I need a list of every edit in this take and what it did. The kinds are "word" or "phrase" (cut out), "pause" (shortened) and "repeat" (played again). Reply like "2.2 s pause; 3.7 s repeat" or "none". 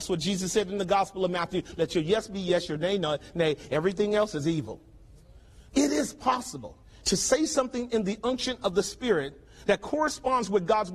5.7 s pause; 6.8 s pause